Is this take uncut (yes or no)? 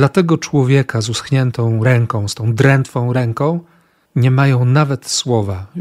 yes